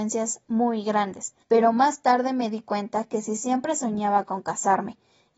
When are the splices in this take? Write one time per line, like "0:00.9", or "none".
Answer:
0:01.4